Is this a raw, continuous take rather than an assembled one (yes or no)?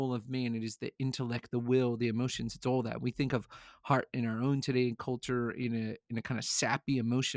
yes